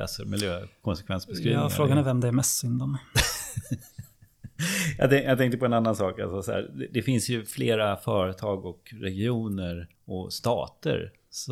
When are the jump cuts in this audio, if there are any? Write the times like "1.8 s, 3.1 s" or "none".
9.9 s